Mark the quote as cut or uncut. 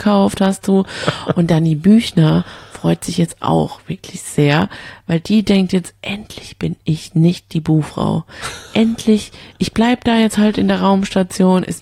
uncut